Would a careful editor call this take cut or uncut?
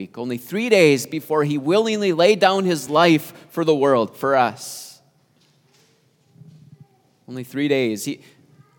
uncut